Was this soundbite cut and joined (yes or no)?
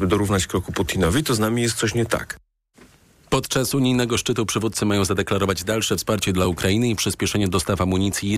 no